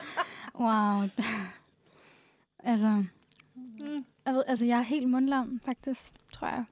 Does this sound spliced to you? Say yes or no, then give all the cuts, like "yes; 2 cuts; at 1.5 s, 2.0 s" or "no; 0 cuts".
no; 0 cuts